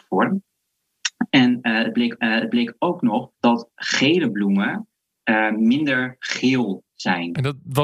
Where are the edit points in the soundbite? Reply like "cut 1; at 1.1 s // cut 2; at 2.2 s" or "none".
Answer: cut 1; at 2.2 s // cut 2; at 3.3 s